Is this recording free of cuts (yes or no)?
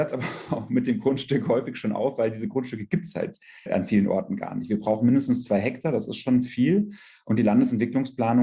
no